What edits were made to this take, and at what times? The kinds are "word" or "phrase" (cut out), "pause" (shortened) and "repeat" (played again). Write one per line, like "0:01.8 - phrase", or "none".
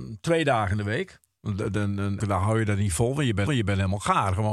0:02.2 - word
0:03.5 - repeat